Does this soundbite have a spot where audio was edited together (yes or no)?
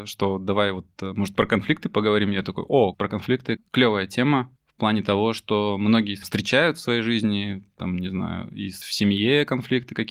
yes